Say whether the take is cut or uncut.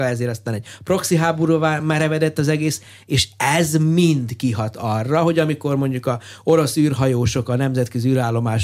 uncut